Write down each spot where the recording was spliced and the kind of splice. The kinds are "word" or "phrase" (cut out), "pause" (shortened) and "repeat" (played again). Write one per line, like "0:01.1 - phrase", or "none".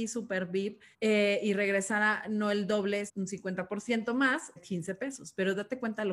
0:00.9 - pause
0:03.1 - word
0:04.6 - word

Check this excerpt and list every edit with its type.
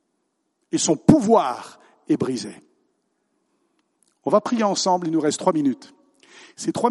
none

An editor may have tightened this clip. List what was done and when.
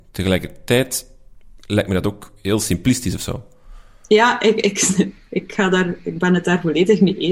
none

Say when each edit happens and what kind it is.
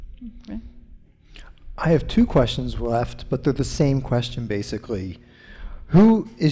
none

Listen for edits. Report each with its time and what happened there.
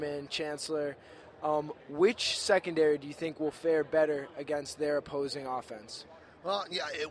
none

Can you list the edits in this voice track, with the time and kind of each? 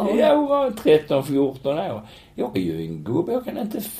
0:02.5 - phrase
0:03.0 - word

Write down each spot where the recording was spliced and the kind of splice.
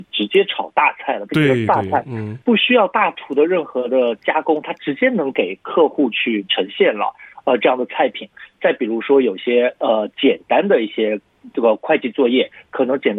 0:02.4 - pause

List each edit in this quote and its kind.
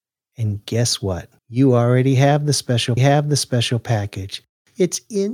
0:01.4 - pause
0:03.0 - repeat

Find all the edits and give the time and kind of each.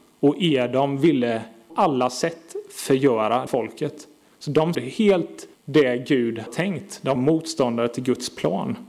0:01.7 - word
0:03.5 - word
0:04.7 - word
0:05.5 - word
0:06.5 - word
0:07.2 - word

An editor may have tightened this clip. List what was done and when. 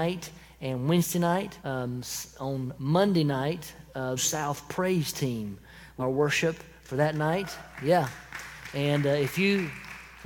0:01.6 - pause
0:04.2 - phrase
0:06.0 - phrase

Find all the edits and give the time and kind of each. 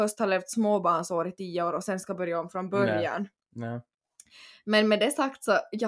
none

